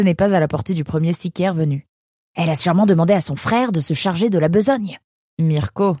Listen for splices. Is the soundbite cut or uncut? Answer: uncut